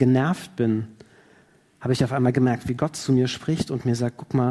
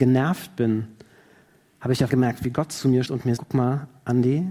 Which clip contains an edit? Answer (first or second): second